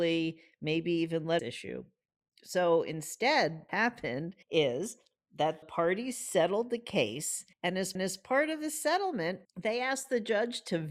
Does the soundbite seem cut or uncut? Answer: cut